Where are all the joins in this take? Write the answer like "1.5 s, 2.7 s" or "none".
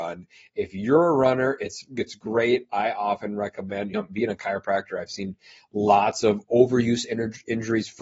none